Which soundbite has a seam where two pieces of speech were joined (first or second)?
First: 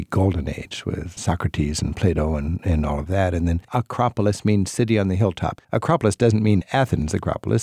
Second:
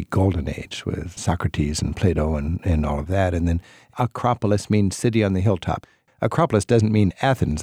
first